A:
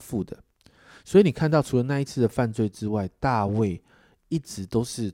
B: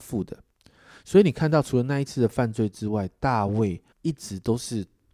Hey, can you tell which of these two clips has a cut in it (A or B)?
B